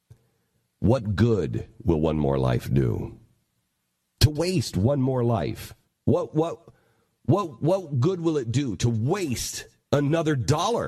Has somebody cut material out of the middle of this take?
no; 0 cuts

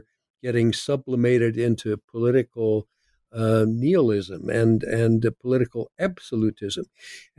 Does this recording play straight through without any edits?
yes; 0 cuts

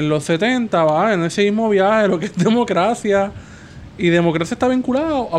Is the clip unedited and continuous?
yes; 0 cuts

